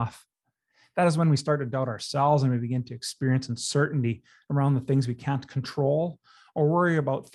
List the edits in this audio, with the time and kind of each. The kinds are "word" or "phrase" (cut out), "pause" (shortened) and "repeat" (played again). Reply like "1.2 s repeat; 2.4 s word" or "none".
none